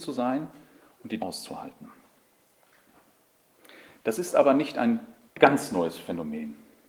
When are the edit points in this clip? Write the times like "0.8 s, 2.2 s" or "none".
1.2 s, 5.2 s